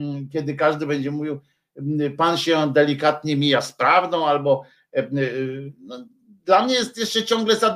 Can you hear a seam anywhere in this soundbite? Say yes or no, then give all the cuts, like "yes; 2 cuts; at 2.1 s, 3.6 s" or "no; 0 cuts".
no; 0 cuts